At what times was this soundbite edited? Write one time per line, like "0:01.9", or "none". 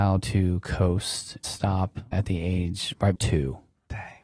0:01.4
0:02.1
0:03.2